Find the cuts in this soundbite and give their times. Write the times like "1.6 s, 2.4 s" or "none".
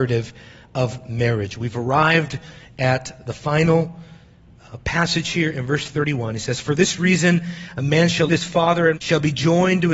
8.3 s, 9.0 s